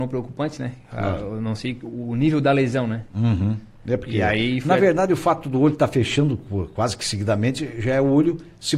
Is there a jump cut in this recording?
no; 0 cuts

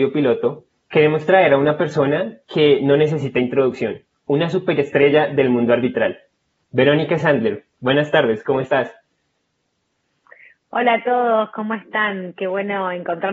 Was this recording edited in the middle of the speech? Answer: no; 0 cuts

